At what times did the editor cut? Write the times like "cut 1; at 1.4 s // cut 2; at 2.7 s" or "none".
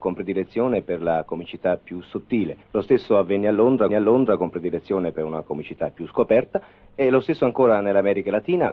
cut 1; at 2.6 s // cut 2; at 3.9 s